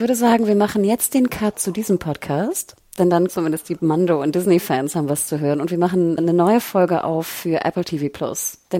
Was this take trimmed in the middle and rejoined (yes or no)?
yes